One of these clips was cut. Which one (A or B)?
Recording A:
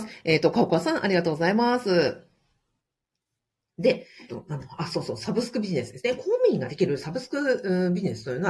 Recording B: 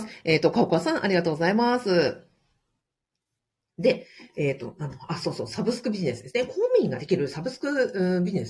A